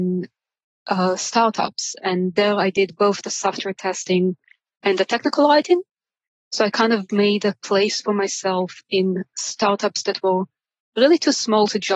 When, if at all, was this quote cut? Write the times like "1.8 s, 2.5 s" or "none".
none